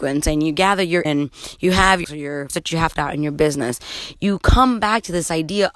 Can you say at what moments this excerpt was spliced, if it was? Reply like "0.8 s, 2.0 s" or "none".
1.0 s, 2.0 s, 2.5 s, 3.0 s